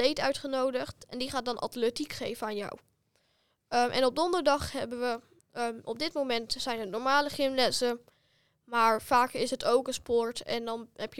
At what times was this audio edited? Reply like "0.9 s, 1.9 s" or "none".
none